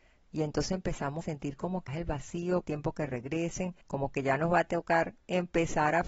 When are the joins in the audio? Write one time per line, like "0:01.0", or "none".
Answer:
0:01.2
0:01.9
0:02.6
0:03.8